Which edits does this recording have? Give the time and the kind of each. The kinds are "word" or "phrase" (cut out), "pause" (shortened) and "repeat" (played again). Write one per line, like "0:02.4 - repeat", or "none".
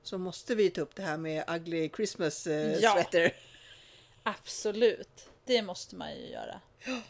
0:05.4 - pause